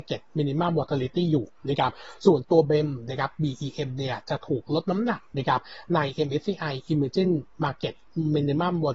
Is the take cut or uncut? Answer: uncut